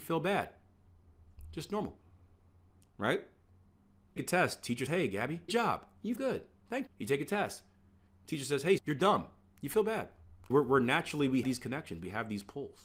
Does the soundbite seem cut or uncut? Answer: cut